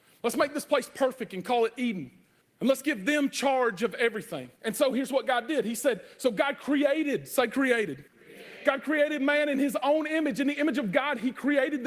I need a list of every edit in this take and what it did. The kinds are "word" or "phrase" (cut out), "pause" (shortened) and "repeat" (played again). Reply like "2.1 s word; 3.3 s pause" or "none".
2.4 s pause; 4.6 s pause; 8.1 s pause